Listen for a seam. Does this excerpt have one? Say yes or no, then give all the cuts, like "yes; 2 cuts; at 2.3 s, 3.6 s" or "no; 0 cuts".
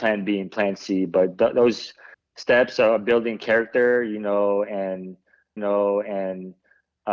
yes; 2 cuts; at 2.1 s, 5.6 s